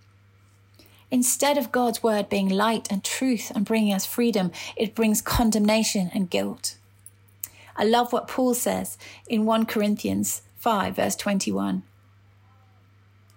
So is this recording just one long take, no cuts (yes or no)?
yes